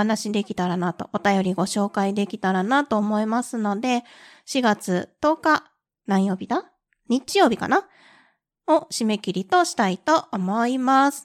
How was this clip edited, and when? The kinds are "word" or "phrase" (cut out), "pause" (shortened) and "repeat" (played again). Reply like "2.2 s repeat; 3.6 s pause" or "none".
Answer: none